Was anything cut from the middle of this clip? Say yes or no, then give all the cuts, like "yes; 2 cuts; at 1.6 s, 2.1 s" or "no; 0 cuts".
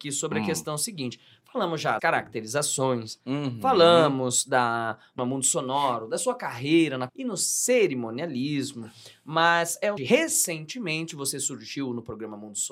yes; 4 cuts; at 2.0 s, 5.2 s, 7.1 s, 10.0 s